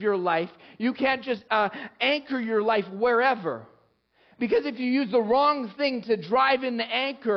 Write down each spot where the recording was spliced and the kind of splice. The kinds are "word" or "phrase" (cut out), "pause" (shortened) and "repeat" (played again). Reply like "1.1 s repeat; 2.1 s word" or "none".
none